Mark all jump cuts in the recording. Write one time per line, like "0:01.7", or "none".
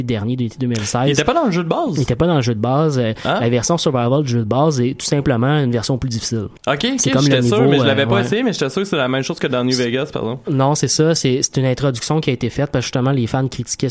0:06.6